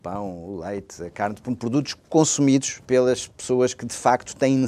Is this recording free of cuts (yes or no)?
no